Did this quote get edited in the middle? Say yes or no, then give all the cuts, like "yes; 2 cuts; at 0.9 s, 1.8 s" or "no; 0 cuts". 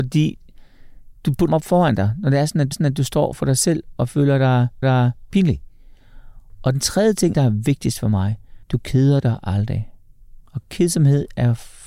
yes; 6 cuts; at 1.5 s, 2.7 s, 4.8 s, 7.3 s, 8.6 s, 10.4 s